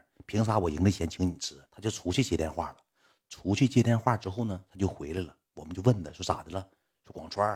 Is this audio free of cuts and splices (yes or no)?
no